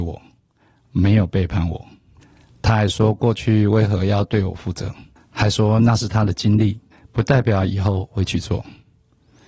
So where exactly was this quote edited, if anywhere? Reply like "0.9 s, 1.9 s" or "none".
2.2 s, 5.2 s, 6.9 s